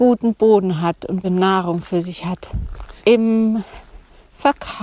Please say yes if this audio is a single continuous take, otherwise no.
no